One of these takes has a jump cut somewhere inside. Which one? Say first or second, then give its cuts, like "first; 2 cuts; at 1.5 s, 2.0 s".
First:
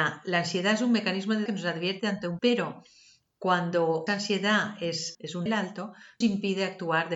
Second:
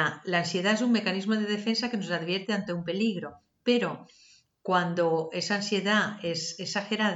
first; 6 cuts; at 1.5 s, 2.4 s, 4.1 s, 5.1 s, 5.5 s, 6.2 s